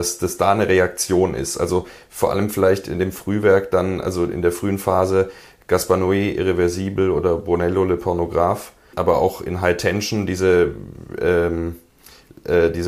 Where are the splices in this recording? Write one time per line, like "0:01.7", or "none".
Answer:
0:08.9